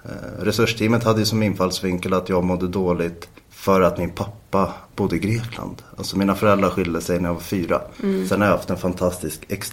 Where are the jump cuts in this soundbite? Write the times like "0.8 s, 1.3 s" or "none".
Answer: 3.4 s, 7.9 s